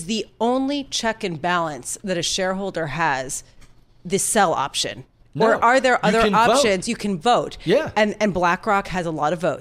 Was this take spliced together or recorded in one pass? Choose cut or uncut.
uncut